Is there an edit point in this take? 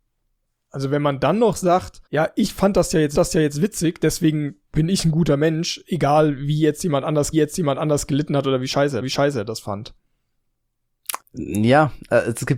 yes; 5 cuts; at 2.1 s, 3.1 s, 7.3 s, 9.0 s, 11.2 s

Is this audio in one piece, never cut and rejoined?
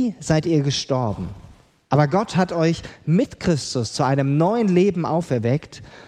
yes; 0 cuts

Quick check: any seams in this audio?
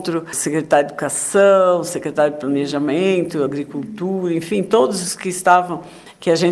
no; 0 cuts

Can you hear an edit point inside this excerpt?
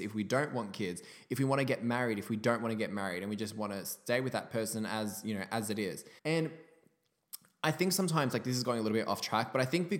yes; 1 cut; at 6.2 s

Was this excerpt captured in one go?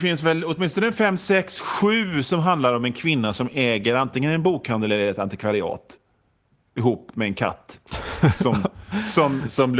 yes; 0 cuts

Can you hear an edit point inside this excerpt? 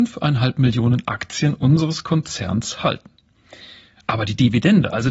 no; 0 cuts

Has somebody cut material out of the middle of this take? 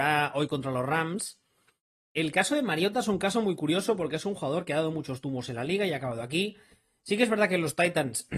no; 0 cuts

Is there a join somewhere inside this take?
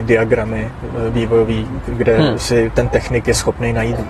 no; 0 cuts

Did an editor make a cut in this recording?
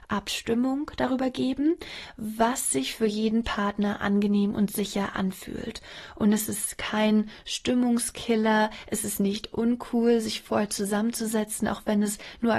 no; 0 cuts

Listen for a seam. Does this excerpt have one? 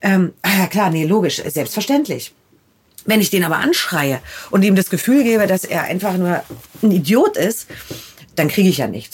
no; 0 cuts

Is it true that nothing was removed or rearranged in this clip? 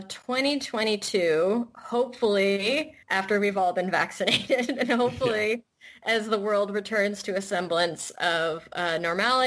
no; 1 cut; at 3.0 s

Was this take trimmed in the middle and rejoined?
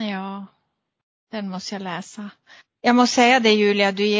no; 0 cuts

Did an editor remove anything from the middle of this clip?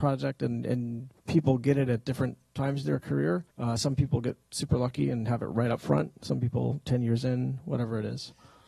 yes; 1 cut; at 3.5 s

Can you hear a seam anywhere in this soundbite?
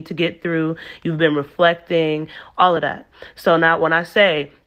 no; 0 cuts

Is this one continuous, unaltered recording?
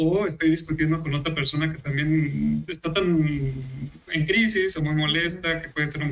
yes; 0 cuts

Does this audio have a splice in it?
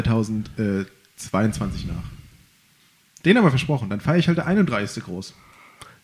no; 0 cuts

